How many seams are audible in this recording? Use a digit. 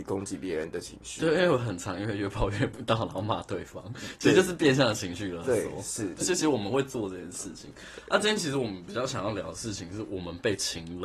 1